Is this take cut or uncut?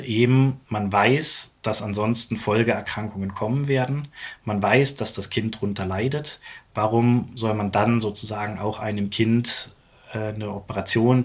uncut